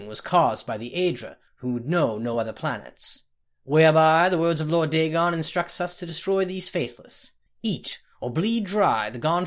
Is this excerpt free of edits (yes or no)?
yes